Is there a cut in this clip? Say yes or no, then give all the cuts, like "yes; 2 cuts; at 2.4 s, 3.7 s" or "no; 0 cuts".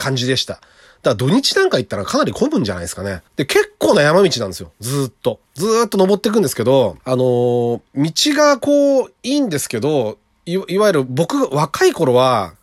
yes; 4 cuts; at 3.3 s, 5.5 s, 7.0 s, 7.9 s